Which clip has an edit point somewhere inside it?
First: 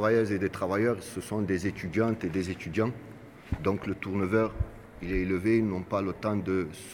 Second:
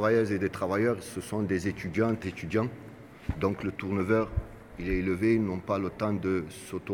second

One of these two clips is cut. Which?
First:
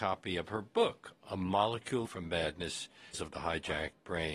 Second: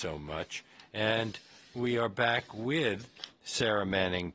first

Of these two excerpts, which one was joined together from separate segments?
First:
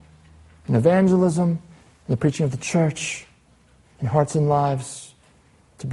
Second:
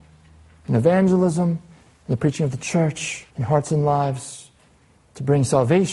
second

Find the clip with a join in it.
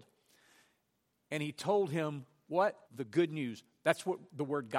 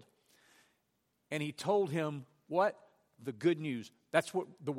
first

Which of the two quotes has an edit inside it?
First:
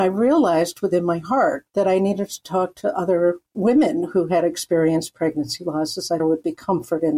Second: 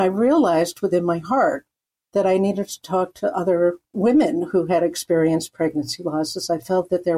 first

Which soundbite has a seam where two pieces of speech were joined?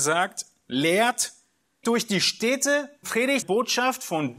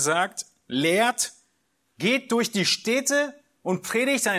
first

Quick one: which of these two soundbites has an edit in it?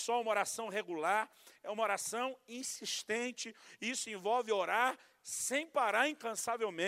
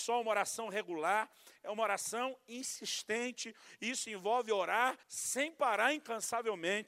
second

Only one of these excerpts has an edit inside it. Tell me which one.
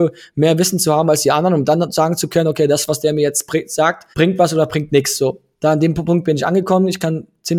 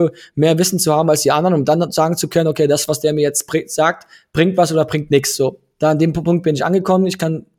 first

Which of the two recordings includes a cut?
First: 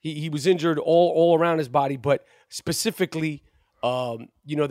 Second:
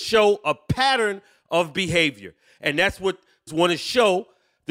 second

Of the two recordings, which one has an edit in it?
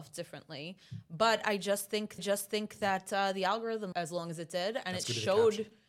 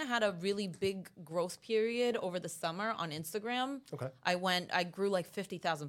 first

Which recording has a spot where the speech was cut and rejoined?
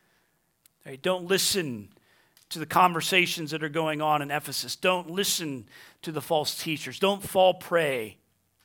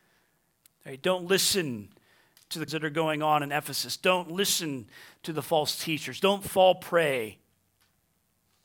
second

